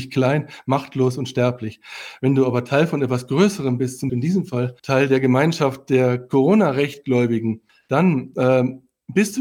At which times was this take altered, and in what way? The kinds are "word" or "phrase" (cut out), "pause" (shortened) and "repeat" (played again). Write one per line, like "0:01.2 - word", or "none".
0:04.1 - word
0:04.8 - pause
0:07.7 - pause